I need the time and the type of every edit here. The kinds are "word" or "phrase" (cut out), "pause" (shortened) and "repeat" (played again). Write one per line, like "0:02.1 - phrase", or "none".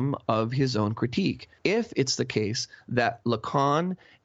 0:01.6 - pause